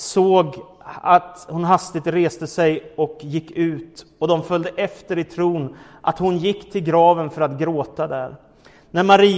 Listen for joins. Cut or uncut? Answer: uncut